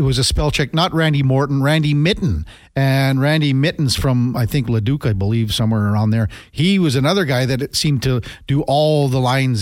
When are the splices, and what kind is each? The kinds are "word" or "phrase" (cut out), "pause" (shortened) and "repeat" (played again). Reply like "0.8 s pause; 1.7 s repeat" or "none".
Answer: none